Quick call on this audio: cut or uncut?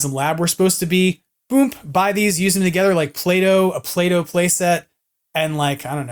uncut